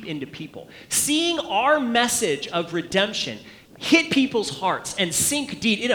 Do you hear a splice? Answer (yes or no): yes